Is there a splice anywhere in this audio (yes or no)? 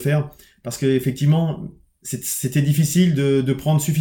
no